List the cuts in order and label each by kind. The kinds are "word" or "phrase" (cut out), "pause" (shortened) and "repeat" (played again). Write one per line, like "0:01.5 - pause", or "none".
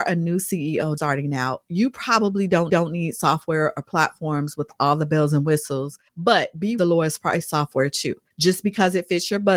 0:01.0 - word
0:02.7 - repeat
0:06.1 - pause
0:06.8 - phrase
0:08.3 - pause